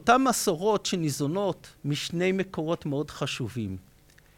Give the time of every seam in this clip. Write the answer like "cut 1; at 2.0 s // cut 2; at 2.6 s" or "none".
cut 1; at 1.8 s